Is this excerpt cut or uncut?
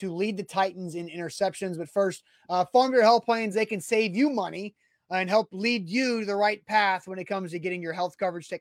uncut